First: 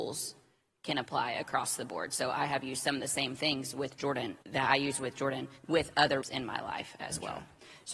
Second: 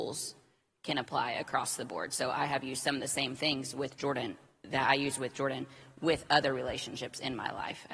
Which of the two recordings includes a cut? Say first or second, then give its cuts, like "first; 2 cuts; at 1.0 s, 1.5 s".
first; 3 cuts; at 4.4 s, 5.6 s, 6.2 s